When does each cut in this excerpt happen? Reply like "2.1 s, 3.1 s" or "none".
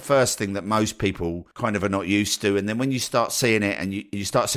1.5 s